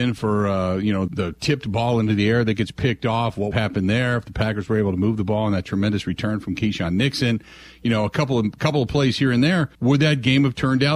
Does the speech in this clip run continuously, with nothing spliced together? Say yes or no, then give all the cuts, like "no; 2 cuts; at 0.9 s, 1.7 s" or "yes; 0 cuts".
no; 3 cuts; at 1.1 s, 3.5 s, 9.7 s